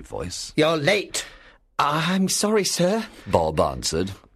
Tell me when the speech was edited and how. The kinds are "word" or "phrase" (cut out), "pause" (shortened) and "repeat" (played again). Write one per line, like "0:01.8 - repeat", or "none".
0:02.3 - word